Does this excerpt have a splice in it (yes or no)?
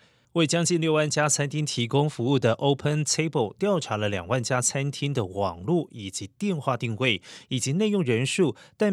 no